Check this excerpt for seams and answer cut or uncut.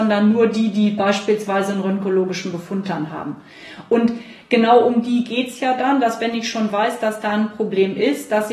uncut